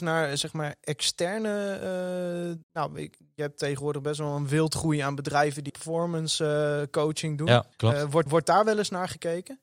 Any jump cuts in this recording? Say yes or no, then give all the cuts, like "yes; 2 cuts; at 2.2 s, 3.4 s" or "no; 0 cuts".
yes; 4 cuts; at 2.6 s, 5.7 s, 7.7 s, 8.3 s